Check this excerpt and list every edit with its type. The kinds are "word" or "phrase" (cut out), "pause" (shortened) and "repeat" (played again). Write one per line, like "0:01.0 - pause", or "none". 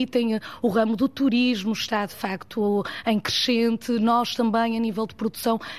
none